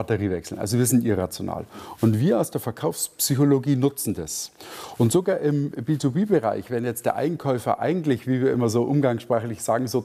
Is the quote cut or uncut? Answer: uncut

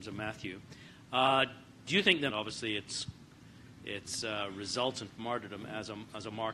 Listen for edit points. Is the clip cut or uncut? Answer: cut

